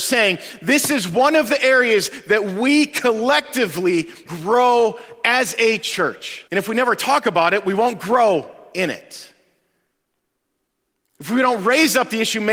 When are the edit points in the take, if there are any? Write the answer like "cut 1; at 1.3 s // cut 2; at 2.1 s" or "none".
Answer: cut 1; at 4.3 s // cut 2; at 6.5 s